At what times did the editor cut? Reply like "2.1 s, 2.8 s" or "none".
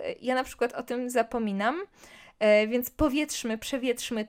none

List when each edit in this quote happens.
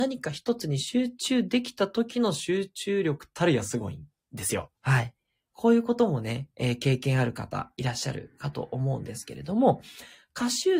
4.8 s

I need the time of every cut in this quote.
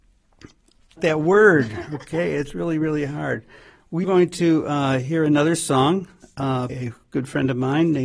1.0 s, 4.0 s, 6.7 s

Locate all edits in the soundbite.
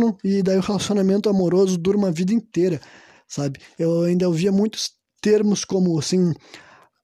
none

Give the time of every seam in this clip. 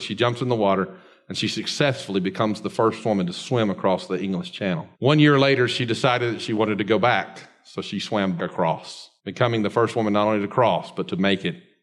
4.9 s, 8.4 s, 9.2 s

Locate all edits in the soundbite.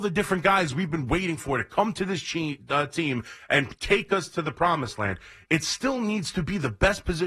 none

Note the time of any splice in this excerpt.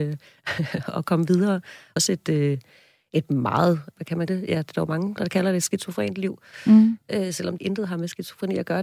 2.0 s, 3.9 s, 4.3 s, 5.2 s, 7.6 s

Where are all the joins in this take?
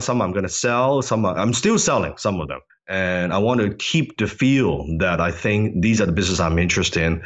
2.7 s

